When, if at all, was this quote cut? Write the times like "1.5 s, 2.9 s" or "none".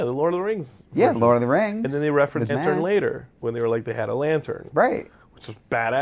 2.5 s, 3.3 s